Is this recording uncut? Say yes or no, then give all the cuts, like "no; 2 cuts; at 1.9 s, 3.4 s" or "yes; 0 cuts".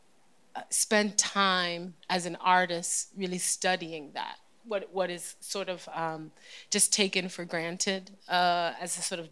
yes; 0 cuts